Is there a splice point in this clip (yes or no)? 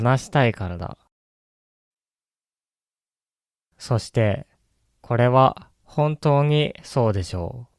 no